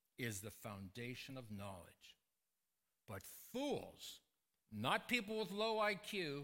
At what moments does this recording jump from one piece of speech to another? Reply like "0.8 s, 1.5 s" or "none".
none